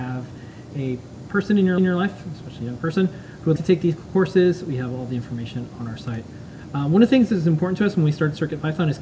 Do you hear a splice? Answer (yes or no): yes